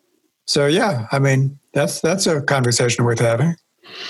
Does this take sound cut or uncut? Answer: uncut